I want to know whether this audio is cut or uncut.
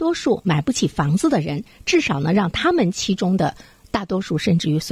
uncut